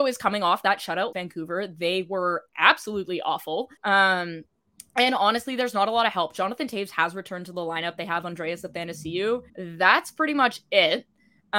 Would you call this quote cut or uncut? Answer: cut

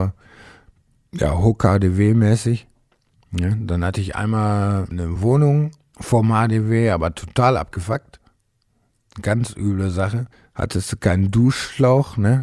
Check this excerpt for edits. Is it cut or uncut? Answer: uncut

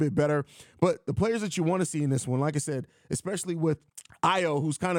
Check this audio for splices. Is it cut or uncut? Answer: uncut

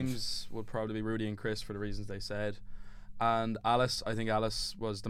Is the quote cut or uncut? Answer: uncut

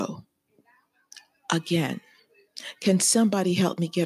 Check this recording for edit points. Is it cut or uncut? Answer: uncut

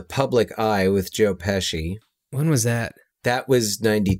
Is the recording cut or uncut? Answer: uncut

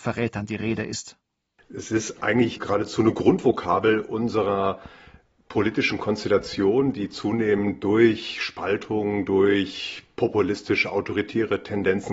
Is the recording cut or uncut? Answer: uncut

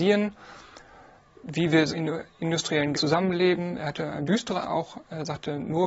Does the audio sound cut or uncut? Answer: cut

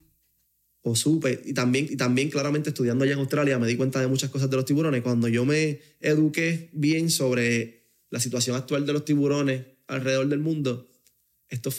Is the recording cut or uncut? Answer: cut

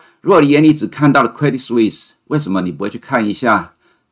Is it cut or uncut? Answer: uncut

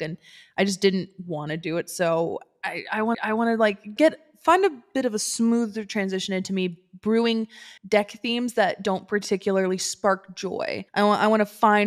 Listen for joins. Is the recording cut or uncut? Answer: cut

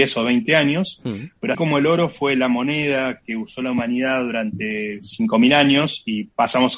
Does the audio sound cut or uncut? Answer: cut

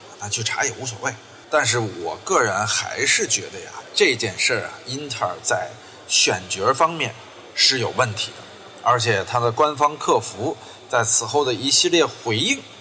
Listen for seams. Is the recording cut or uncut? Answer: cut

